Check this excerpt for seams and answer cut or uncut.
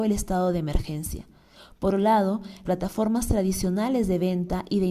cut